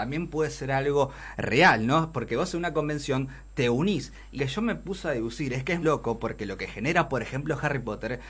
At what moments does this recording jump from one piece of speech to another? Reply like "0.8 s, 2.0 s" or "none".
4.4 s, 5.8 s